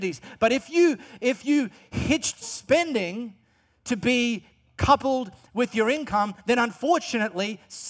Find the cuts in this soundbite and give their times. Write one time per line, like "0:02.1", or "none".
0:02.4